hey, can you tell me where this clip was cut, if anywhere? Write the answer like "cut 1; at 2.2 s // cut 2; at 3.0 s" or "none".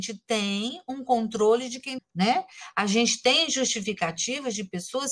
cut 1; at 2.0 s

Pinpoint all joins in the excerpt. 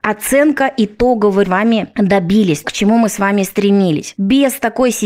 cut 1; at 1.4 s // cut 2; at 2.6 s

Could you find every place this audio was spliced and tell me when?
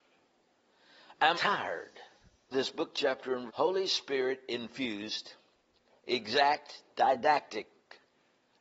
cut 1; at 1.3 s // cut 2; at 2.5 s // cut 3; at 3.5 s // cut 4; at 6.0 s

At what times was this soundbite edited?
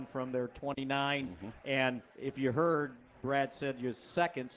cut 1; at 2.1 s

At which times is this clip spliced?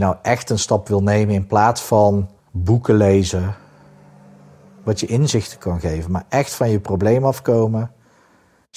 cut 1; at 2.4 s

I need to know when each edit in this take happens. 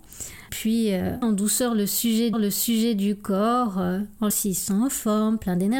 cut 1; at 1.2 s // cut 2; at 2.3 s // cut 3; at 4.3 s

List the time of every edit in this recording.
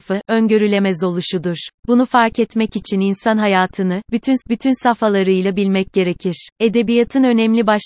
cut 1; at 1.8 s // cut 2; at 4.4 s // cut 3; at 6.5 s

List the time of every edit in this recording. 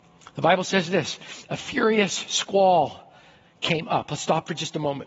none

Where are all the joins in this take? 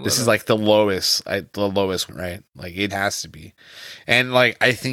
cut 1; at 2.1 s // cut 2; at 2.9 s

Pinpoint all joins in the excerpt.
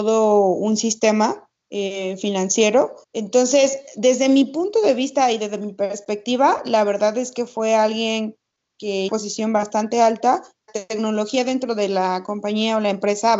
cut 1; at 1.6 s // cut 2; at 3.0 s // cut 3; at 9.1 s // cut 4; at 10.7 s

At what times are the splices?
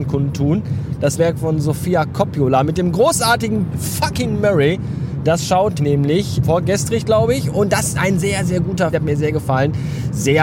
cut 1; at 1.2 s // cut 2; at 3.7 s // cut 3; at 5.8 s // cut 4; at 6.4 s // cut 5; at 7.9 s // cut 6; at 8.9 s

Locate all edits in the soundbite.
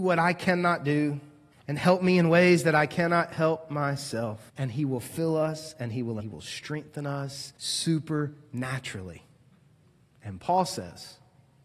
cut 1; at 1.5 s // cut 2; at 4.5 s // cut 3; at 6.2 s // cut 4; at 7.6 s

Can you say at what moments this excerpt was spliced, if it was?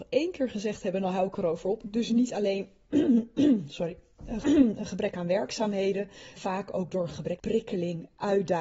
cut 1; at 1.8 s // cut 2; at 4.4 s // cut 3; at 6.4 s // cut 4; at 7.4 s

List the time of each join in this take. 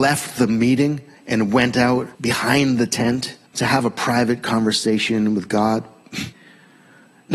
cut 1; at 1.1 s // cut 2; at 2.1 s // cut 3; at 3.5 s // cut 4; at 6.3 s

